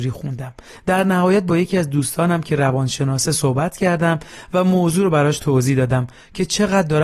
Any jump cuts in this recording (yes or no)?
no